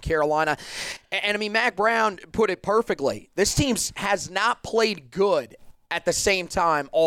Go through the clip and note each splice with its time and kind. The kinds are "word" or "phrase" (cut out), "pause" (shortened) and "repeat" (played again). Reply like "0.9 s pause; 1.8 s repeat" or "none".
none